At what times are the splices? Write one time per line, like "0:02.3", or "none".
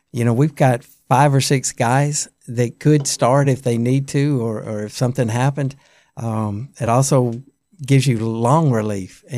none